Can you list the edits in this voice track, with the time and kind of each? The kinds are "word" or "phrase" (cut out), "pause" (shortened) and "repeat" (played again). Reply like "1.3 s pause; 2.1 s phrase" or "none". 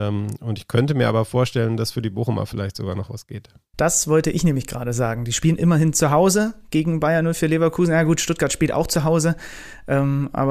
none